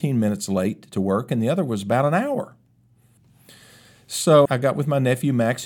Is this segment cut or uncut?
cut